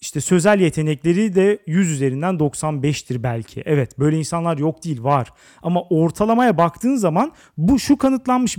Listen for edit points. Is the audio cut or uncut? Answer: uncut